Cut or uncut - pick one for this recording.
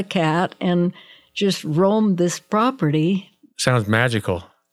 uncut